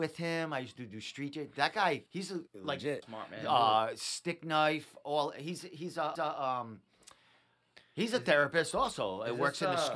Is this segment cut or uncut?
cut